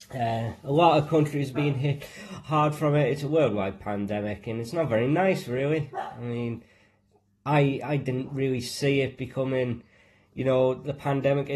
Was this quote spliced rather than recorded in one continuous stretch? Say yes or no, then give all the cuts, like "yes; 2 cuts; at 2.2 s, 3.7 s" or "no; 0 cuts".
no; 0 cuts